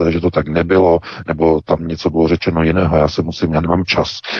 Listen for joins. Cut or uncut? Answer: uncut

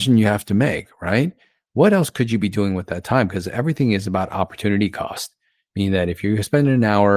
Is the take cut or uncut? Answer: uncut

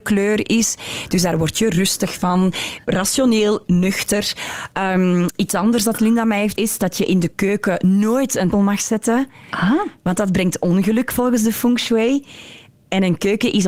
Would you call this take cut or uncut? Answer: cut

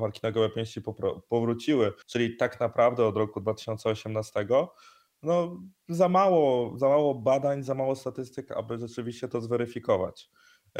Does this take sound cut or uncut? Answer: cut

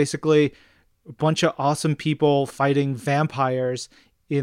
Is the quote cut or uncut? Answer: uncut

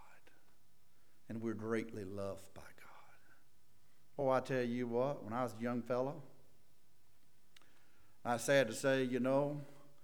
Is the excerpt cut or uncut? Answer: uncut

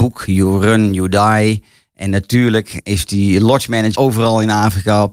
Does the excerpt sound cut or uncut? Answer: cut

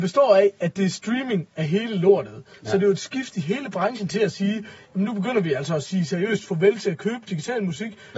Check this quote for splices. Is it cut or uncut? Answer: uncut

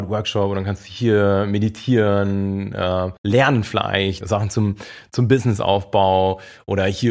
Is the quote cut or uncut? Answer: cut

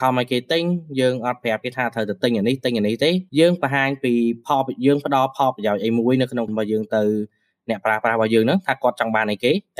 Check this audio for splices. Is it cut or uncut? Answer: cut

